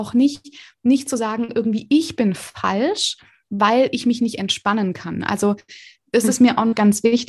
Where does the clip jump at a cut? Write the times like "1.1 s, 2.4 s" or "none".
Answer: none